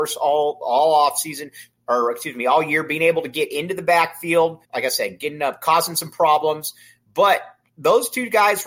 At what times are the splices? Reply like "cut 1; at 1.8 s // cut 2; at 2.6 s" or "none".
cut 1; at 4.6 s